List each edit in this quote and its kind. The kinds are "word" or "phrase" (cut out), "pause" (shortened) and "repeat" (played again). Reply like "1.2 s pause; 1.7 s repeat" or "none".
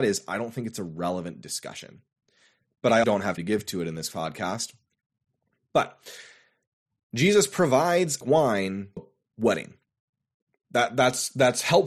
3.0 s word; 3.4 s word; 8.2 s word; 9.0 s word